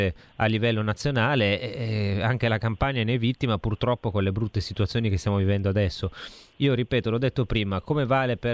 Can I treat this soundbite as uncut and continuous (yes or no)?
yes